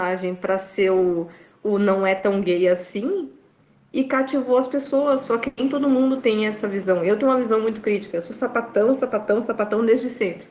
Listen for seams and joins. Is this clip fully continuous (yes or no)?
yes